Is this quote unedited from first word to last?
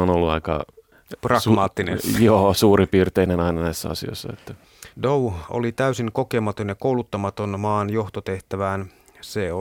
no; 1 cut; at 4.9 s

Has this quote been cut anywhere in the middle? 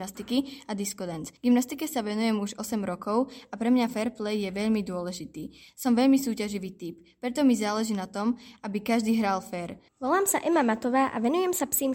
yes; 2 cuts; at 1.4 s, 9.9 s

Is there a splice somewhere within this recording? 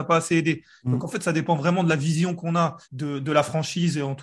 yes; 1 cut; at 2.8 s

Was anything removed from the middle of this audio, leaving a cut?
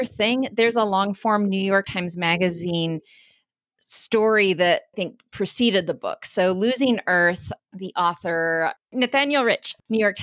yes; 2 cuts; at 4.9 s, 8.8 s

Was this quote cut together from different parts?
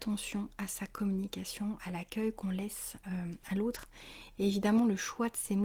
no; 0 cuts

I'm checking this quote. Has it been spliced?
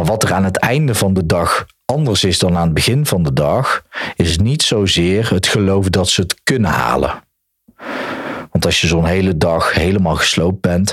no; 0 cuts

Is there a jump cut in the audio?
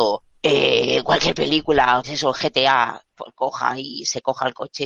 yes; 1 cut; at 2.0 s

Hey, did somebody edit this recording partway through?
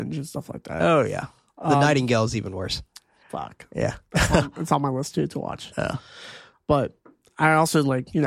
no; 0 cuts

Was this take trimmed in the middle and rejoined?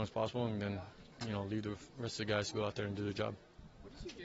no; 0 cuts

